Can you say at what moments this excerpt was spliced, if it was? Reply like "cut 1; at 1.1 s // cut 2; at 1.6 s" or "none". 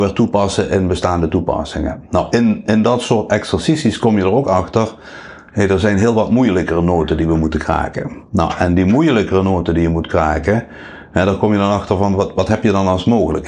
none